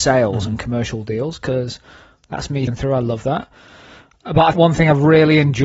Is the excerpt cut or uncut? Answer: cut